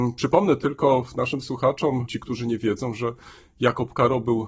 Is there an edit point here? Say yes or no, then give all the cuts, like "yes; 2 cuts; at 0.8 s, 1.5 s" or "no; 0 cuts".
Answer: no; 0 cuts